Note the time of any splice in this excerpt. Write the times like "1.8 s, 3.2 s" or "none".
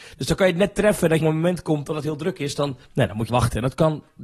1.2 s, 2.8 s, 3.3 s